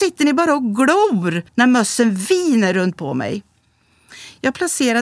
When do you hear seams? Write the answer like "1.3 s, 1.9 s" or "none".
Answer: 1.5 s, 3.0 s